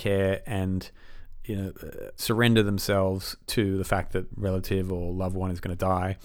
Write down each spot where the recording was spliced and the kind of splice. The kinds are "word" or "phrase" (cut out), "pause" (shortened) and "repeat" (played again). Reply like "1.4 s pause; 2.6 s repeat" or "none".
2.2 s word; 4.3 s word

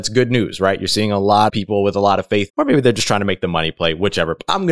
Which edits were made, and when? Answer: 1.5 s word; 2.5 s word

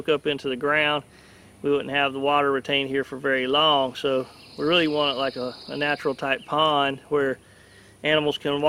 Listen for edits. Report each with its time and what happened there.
none

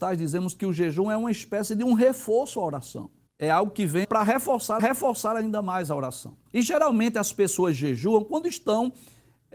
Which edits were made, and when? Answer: 3.3 s pause; 4.0 s word; 4.8 s repeat; 6.5 s pause

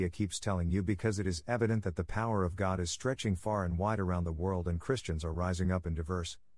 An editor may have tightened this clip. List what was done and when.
none

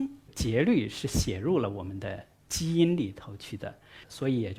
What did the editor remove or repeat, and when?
none

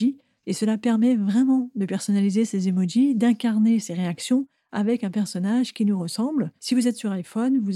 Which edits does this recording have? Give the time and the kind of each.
6.6 s pause

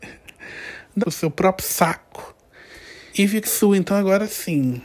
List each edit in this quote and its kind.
1.0 s phrase; 3.1 s pause; 3.4 s word

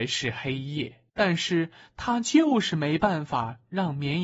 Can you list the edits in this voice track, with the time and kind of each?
1.1 s pause

